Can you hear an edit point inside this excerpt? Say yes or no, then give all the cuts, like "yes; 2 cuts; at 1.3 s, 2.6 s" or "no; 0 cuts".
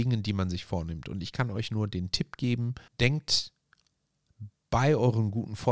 yes; 1 cut; at 2.9 s